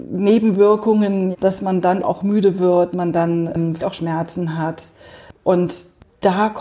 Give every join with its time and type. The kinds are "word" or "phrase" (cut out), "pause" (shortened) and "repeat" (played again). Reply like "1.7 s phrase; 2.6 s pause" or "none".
1.3 s word; 2.0 s word; 2.9 s word; 3.8 s word